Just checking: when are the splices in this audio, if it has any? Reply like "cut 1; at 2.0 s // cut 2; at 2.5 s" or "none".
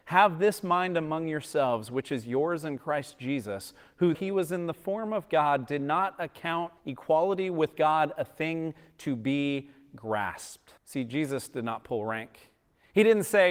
cut 1; at 4.1 s // cut 2; at 6.8 s // cut 3; at 10.8 s